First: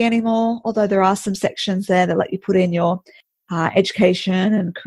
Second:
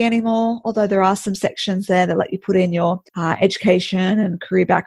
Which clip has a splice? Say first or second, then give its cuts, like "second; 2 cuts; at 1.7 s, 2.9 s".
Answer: second; 1 cut; at 3.1 s